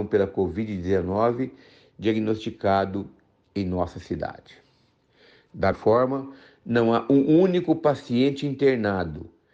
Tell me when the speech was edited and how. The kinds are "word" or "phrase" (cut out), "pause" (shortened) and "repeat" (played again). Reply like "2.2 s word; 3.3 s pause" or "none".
5.7 s word